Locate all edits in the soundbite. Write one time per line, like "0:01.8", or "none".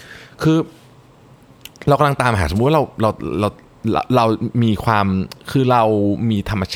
0:05.4